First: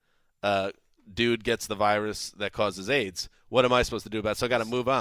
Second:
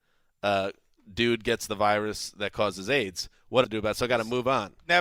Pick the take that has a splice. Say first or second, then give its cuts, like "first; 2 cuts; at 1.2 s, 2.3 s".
second; 1 cut; at 3.6 s